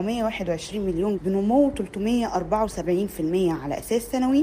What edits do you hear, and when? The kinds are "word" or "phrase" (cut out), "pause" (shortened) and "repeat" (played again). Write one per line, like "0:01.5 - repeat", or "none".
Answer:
0:01.2 - word